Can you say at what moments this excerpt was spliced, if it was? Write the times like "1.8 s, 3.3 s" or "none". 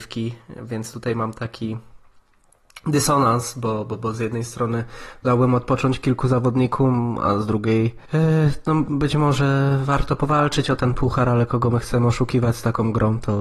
8.1 s